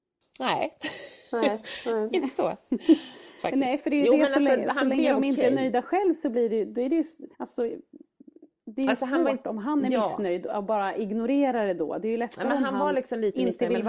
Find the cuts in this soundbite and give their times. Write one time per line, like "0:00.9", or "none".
0:07.3